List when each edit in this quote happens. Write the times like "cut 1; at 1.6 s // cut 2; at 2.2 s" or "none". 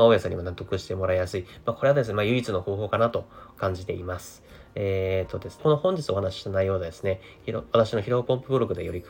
cut 1; at 5.6 s